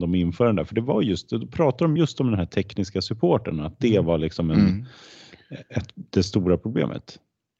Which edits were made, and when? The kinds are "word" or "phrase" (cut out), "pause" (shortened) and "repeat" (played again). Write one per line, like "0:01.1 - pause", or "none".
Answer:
none